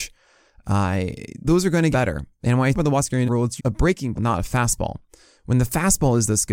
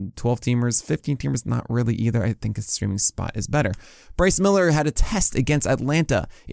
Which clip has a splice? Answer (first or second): first